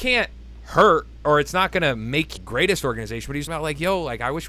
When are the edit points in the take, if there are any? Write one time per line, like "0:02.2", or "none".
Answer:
0:02.4
0:03.5